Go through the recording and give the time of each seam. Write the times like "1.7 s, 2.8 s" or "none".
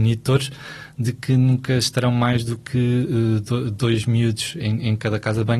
none